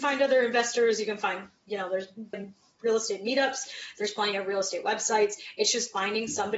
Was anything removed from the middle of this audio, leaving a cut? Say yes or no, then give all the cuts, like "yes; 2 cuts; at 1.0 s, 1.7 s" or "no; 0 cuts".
yes; 1 cut; at 2.3 s